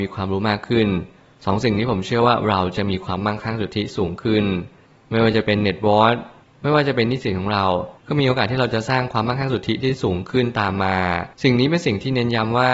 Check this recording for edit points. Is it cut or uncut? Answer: cut